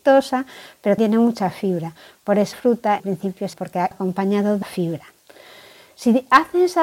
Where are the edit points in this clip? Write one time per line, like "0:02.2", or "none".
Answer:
0:01.0
0:02.5
0:03.0
0:03.5
0:03.9
0:04.6